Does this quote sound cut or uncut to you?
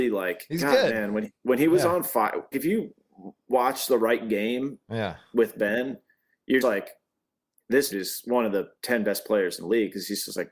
cut